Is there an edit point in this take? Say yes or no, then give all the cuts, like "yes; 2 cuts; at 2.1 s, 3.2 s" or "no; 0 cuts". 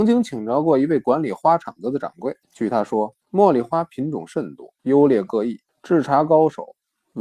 yes; 4 cuts; at 2.4 s, 3.2 s, 4.8 s, 5.7 s